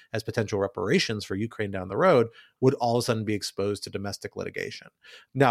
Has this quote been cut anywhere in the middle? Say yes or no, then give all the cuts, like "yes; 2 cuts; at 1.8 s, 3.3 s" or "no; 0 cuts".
no; 0 cuts